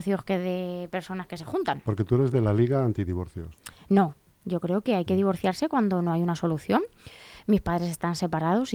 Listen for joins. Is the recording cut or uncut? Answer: uncut